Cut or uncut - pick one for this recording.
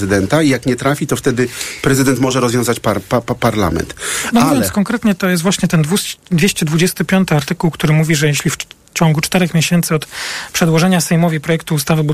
uncut